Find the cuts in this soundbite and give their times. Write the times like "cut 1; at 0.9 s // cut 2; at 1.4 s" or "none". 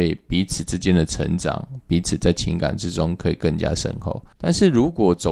cut 1; at 4.3 s

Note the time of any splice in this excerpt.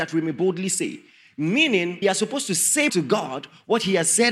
cut 1; at 2.0 s // cut 2; at 2.9 s

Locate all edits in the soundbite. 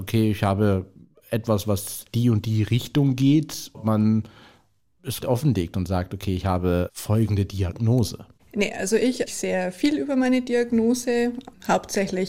cut 1; at 2.0 s // cut 2; at 3.7 s // cut 3; at 5.2 s // cut 4; at 8.4 s // cut 5; at 9.3 s

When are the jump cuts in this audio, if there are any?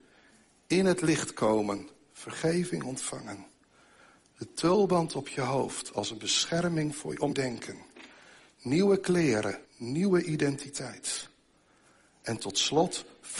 cut 1; at 7.3 s // cut 2; at 9.7 s

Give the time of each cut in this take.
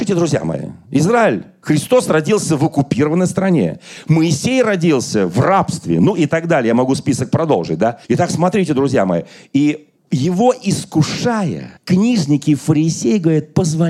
cut 1; at 8.0 s // cut 2; at 10.0 s // cut 3; at 11.8 s

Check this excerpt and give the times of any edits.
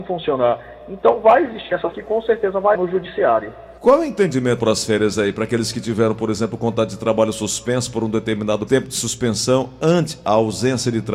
cut 1; at 1.9 s // cut 2; at 2.7 s // cut 3; at 3.8 s // cut 4; at 4.6 s // cut 5; at 8.7 s

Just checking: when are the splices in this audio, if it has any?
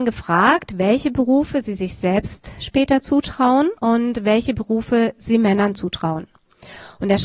cut 1; at 3.8 s

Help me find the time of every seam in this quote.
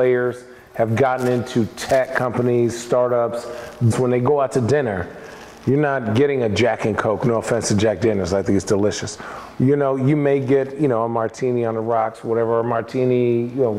cut 1; at 3.9 s

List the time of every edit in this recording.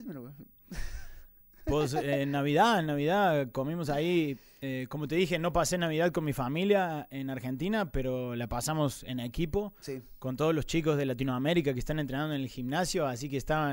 none

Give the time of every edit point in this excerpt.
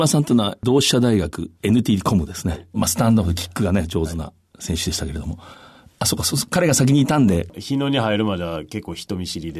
cut 1; at 1.5 s // cut 2; at 2.7 s // cut 3; at 5.9 s

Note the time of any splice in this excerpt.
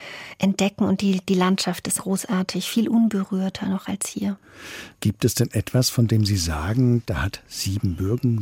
cut 1; at 2.0 s // cut 2; at 4.9 s

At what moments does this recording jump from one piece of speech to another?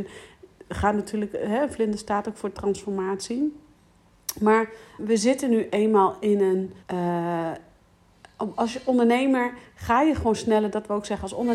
cut 1; at 5.0 s // cut 2; at 6.8 s

